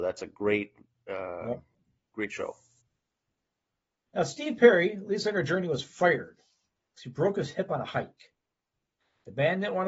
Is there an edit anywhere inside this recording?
no; 0 cuts

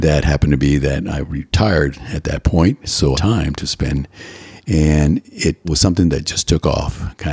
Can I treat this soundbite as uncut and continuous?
no; 2 cuts; at 3.1 s, 5.6 s

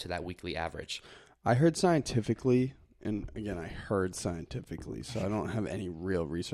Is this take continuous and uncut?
yes; 0 cuts

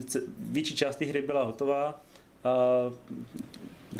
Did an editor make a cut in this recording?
no; 0 cuts

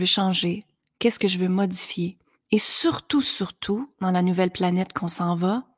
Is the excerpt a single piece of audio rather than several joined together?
yes; 0 cuts

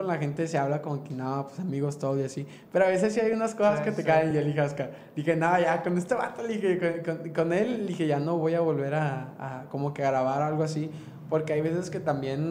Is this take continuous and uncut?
yes; 0 cuts

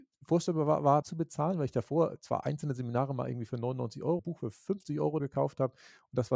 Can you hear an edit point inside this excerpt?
yes; 3 cuts; at 1.0 s, 4.2 s, 5.2 s

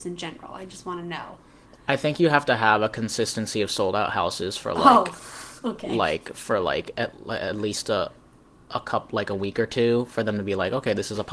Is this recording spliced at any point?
no; 0 cuts

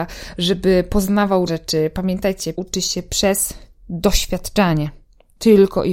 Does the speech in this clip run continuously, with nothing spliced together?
no; 2 cuts; at 1.5 s, 2.5 s

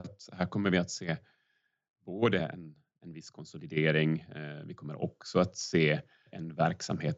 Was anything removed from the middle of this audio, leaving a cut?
no; 0 cuts

